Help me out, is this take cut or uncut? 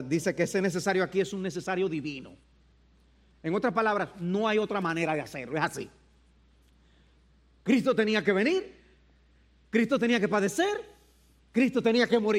uncut